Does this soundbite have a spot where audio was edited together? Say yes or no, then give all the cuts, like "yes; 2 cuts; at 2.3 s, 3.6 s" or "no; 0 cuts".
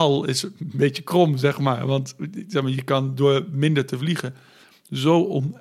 no; 0 cuts